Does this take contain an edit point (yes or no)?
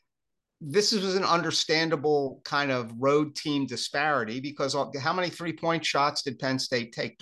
yes